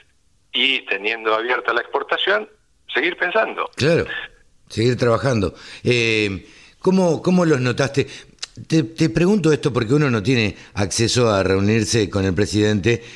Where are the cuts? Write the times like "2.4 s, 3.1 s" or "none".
none